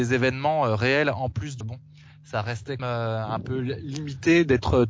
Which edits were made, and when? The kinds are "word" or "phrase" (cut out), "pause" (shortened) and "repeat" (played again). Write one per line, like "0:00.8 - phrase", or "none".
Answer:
0:01.6 - word
0:02.8 - phrase